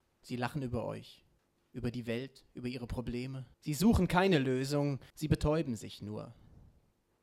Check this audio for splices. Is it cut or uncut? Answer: cut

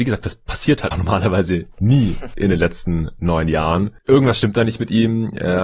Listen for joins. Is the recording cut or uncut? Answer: cut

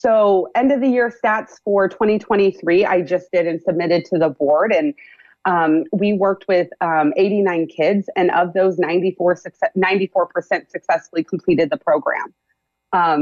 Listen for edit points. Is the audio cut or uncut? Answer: uncut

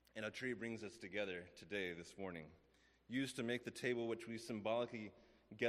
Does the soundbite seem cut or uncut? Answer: uncut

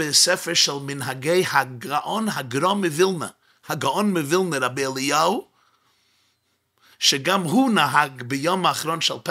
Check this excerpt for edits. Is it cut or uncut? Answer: uncut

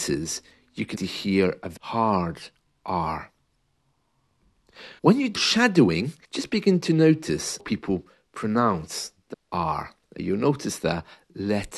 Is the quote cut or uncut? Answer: cut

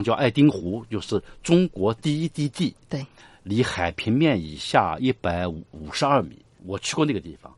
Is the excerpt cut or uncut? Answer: uncut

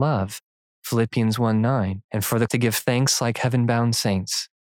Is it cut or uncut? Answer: cut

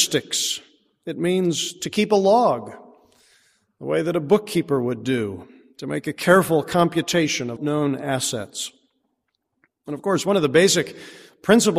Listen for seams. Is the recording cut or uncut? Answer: cut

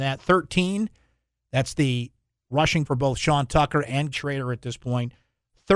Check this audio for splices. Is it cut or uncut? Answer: cut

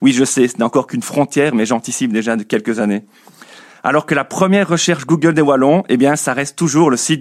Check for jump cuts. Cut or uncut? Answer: uncut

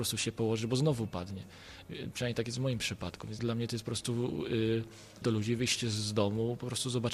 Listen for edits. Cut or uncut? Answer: cut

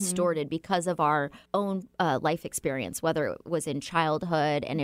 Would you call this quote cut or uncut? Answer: cut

